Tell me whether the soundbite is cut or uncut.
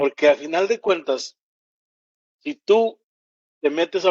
uncut